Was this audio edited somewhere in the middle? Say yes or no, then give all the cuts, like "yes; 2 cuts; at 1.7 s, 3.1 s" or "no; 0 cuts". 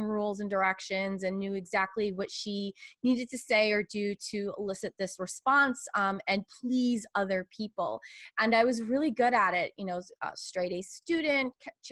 no; 0 cuts